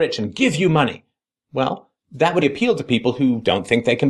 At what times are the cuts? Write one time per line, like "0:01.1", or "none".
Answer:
0:02.0
0:02.4